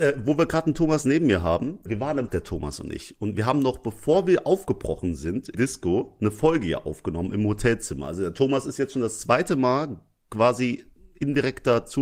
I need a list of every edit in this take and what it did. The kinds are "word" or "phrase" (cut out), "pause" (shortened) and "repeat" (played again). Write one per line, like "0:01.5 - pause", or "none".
0:01.9 - word
0:02.3 - word
0:05.5 - word